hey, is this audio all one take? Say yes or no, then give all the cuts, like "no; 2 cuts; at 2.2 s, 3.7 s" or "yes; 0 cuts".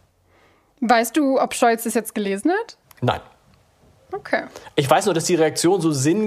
yes; 0 cuts